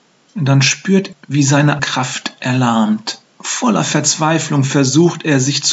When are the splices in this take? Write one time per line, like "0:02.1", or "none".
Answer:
0:01.1
0:01.8
0:03.3

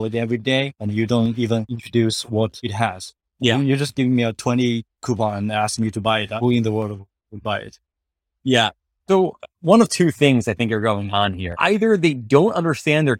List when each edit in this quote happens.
none

